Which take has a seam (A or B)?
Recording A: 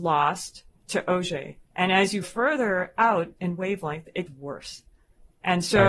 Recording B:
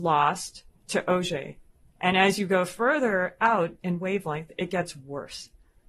A